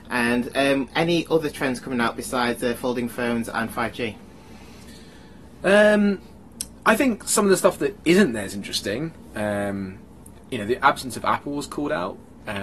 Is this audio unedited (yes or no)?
yes